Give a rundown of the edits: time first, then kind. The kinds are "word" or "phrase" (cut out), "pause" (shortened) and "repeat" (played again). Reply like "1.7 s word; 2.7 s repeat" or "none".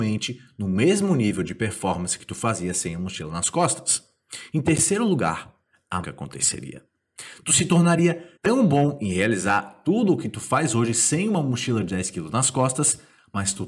6.0 s word; 8.4 s pause